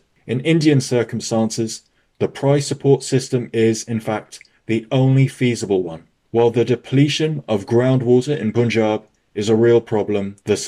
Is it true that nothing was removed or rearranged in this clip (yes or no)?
yes